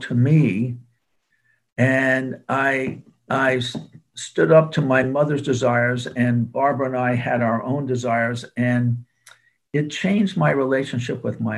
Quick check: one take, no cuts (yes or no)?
yes